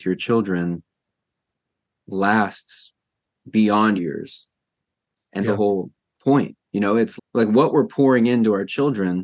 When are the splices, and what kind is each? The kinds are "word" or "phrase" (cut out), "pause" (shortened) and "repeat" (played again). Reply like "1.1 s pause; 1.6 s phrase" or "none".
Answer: 4.0 s word; 5.4 s word; 7.2 s word